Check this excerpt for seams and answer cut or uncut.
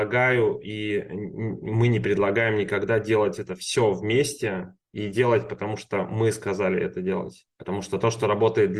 cut